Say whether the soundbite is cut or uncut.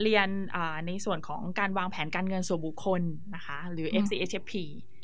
uncut